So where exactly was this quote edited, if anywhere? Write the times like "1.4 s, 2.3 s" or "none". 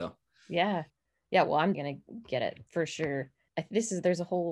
1.7 s, 2.7 s